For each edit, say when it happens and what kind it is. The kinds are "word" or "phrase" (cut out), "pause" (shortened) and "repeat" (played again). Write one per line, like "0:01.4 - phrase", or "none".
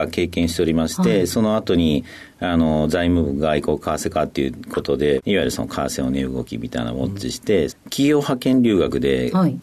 0:07.7 - phrase